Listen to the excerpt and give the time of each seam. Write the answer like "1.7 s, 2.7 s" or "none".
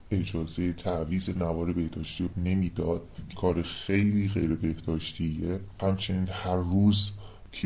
2.3 s, 3.3 s